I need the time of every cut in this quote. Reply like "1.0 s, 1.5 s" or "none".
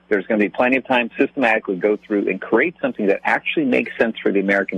1.1 s